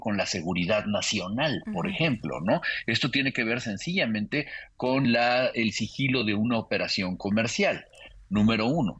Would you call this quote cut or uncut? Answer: uncut